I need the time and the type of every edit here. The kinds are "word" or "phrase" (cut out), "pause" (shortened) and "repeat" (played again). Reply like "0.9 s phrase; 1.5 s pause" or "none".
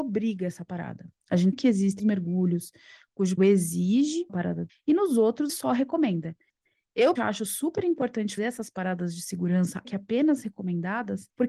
1.5 s word; 2.0 s word; 3.4 s word; 4.3 s word; 4.7 s word; 5.5 s word; 7.2 s word; 8.4 s word; 9.8 s word